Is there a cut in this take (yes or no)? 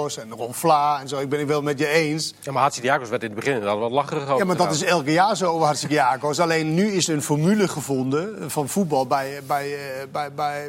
no